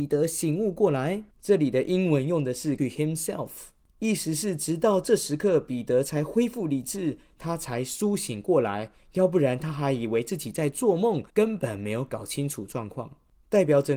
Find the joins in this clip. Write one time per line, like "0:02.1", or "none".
0:01.3
0:02.8
0:11.3